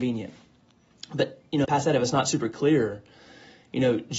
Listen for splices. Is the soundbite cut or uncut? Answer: cut